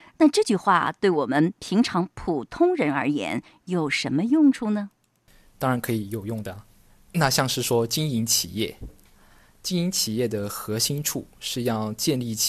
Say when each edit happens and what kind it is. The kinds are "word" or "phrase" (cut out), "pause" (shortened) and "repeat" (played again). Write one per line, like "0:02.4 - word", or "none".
none